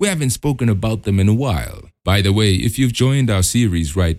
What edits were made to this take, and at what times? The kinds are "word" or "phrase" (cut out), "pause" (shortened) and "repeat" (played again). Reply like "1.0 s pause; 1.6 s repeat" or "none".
2.0 s pause; 2.9 s word